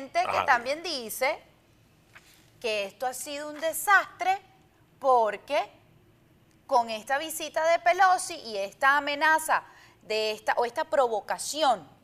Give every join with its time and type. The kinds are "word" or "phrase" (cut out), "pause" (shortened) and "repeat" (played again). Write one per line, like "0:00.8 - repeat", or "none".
none